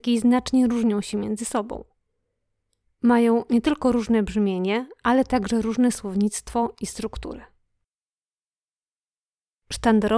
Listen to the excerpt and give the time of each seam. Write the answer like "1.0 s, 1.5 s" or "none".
none